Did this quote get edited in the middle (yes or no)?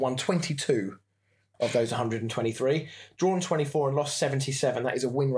no